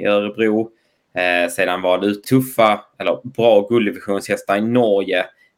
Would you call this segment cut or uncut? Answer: cut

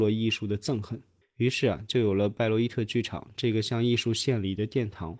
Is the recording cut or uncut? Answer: cut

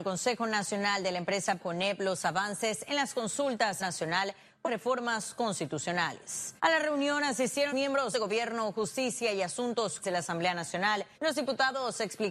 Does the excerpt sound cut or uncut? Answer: cut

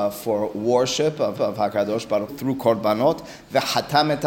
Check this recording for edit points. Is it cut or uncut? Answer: cut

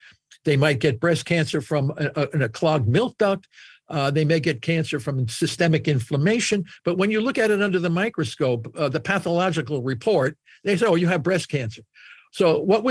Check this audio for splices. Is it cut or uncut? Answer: uncut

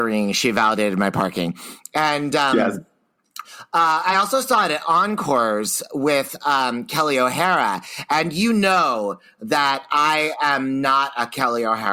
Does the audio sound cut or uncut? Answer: uncut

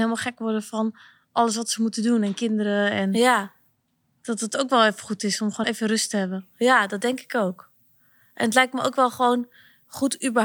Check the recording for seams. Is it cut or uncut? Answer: cut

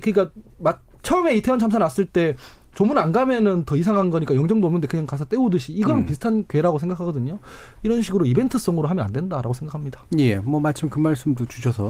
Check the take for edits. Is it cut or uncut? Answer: uncut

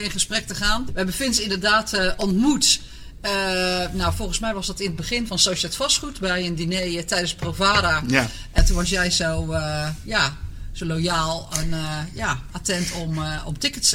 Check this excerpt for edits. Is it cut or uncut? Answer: cut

